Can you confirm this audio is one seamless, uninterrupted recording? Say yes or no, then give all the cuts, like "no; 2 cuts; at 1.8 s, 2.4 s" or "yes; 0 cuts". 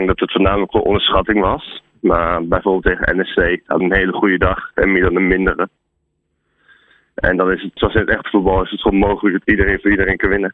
no; 2 cuts; at 3.8 s, 7.8 s